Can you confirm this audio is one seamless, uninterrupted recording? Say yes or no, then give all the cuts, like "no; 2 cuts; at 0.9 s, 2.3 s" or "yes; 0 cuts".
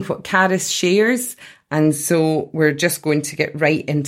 yes; 0 cuts